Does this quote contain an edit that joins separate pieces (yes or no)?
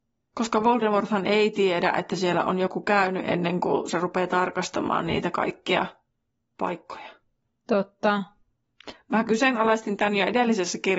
no